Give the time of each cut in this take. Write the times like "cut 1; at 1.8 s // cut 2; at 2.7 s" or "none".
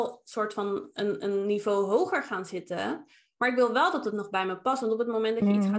none